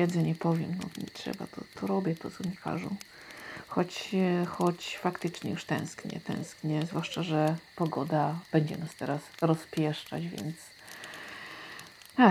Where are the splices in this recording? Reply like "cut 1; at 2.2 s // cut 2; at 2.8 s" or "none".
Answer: cut 1; at 8.4 s